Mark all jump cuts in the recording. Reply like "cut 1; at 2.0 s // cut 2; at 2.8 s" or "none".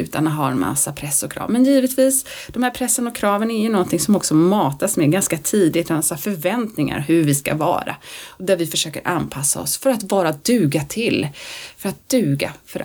none